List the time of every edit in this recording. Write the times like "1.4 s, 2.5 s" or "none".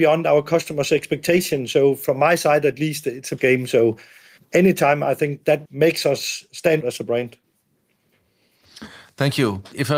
3.4 s, 5.7 s, 6.8 s